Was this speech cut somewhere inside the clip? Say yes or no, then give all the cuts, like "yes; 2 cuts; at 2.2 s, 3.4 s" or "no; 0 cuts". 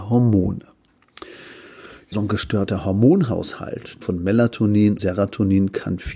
yes; 3 cuts; at 2.1 s, 4.0 s, 5.0 s